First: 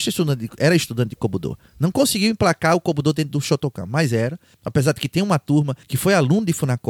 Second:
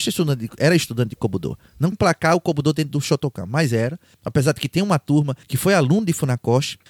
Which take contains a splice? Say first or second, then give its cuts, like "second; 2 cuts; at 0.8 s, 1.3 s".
second; 1 cut; at 1.9 s